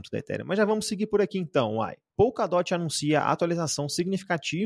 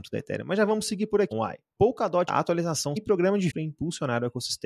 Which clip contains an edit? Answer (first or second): second